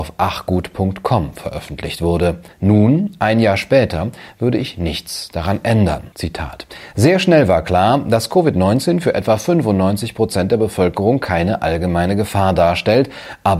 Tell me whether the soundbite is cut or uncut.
cut